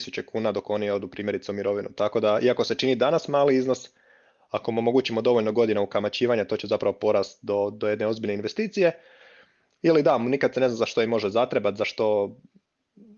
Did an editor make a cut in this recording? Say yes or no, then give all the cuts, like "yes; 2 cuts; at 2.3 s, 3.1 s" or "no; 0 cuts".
no; 0 cuts